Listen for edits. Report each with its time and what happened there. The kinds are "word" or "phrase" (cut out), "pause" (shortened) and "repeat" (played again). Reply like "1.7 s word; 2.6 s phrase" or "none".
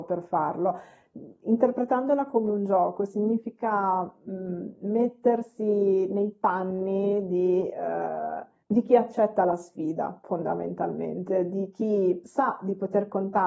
8.6 s pause